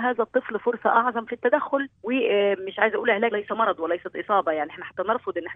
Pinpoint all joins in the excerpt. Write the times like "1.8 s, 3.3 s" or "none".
1.9 s, 3.3 s